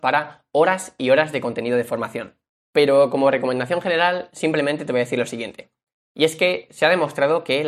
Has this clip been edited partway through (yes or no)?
no